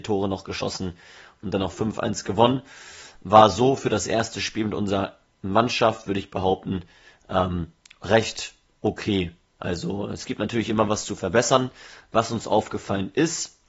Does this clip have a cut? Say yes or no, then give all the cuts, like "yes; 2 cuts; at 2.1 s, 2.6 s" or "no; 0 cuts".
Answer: no; 0 cuts